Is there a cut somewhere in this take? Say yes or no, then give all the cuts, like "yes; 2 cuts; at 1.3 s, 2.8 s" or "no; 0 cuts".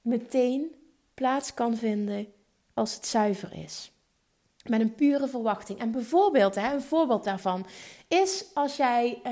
no; 0 cuts